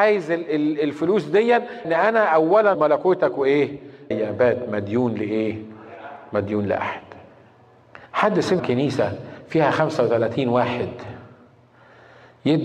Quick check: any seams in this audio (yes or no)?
yes